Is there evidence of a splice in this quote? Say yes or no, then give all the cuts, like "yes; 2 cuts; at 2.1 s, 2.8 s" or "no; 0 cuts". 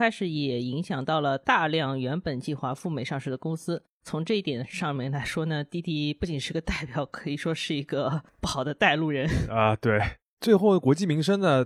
no; 0 cuts